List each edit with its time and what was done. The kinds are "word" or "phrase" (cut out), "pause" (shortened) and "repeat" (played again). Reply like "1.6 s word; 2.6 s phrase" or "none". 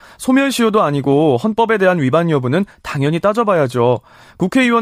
none